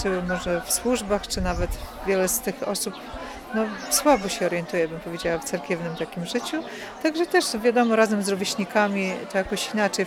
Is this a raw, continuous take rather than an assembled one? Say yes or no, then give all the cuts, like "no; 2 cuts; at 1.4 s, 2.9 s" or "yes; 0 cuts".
yes; 0 cuts